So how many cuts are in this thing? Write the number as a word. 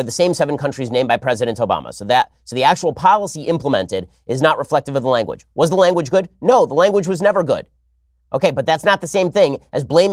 zero